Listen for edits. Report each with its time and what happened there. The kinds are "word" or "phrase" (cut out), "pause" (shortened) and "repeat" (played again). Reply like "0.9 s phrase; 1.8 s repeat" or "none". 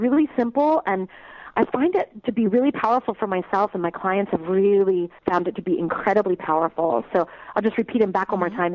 5.2 s pause